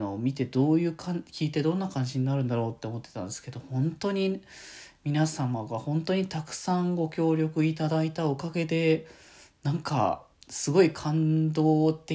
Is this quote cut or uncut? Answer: cut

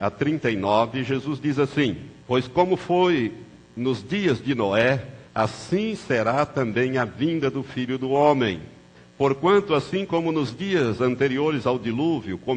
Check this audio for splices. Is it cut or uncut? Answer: cut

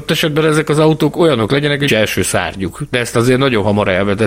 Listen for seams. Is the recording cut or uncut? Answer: cut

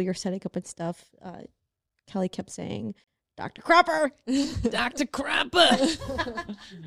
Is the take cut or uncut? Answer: uncut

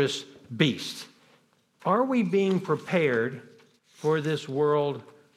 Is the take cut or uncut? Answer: uncut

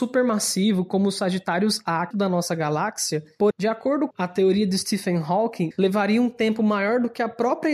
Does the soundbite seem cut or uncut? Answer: cut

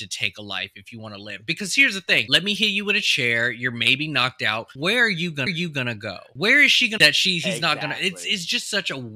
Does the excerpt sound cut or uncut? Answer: cut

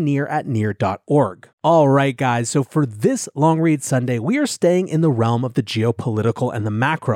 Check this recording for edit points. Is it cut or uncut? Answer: cut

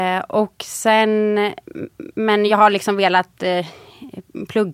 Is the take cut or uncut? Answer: uncut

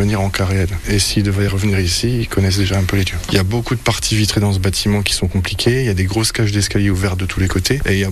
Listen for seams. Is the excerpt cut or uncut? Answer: uncut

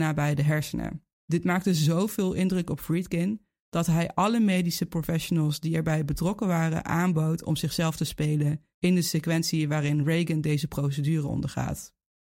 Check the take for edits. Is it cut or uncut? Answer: cut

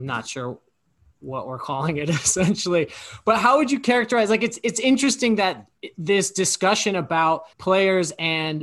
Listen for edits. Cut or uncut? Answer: cut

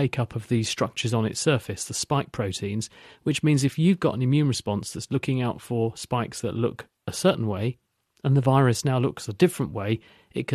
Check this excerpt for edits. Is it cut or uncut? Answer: uncut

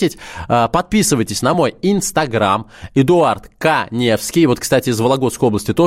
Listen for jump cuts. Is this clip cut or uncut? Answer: uncut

